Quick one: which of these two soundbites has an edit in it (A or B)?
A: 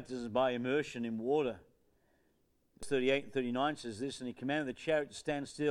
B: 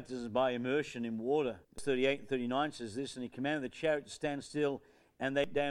B